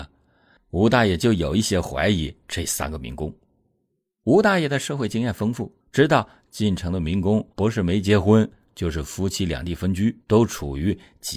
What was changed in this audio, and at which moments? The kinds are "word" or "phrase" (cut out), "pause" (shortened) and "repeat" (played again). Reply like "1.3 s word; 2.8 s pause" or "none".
5.8 s pause; 7.5 s pause; 10.2 s pause